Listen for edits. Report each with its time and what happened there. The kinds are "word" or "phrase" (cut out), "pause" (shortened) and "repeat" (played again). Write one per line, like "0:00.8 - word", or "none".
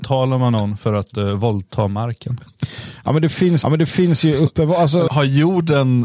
0:03.6 - repeat
0:05.1 - word